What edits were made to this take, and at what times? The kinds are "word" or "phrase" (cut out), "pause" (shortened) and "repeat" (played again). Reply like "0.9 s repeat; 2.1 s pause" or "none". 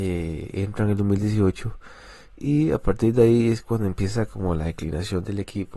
none